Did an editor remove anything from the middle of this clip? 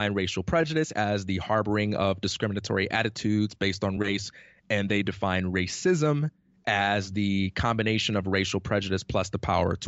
no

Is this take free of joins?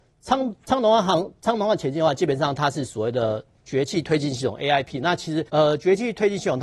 no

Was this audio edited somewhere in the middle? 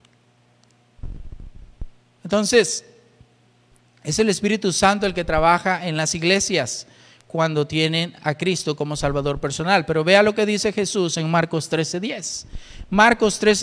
no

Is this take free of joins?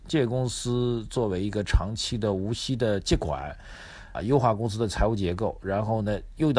no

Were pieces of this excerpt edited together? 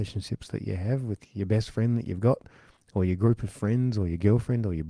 no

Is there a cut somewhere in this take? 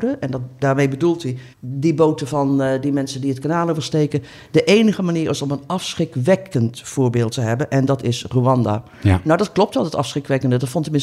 yes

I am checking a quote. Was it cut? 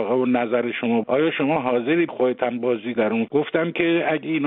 yes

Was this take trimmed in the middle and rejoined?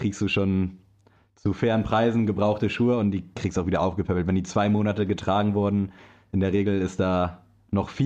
no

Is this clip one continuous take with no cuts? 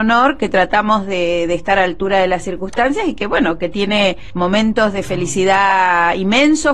yes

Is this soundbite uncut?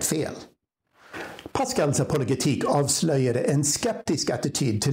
yes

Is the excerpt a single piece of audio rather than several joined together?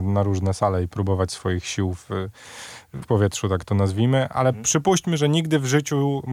no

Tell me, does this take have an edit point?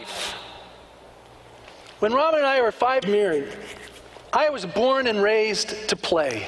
yes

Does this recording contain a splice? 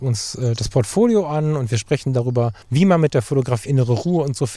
yes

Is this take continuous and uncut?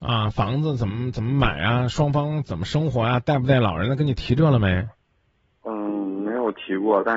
yes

